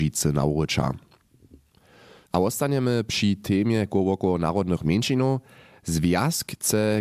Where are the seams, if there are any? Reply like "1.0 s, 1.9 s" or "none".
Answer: none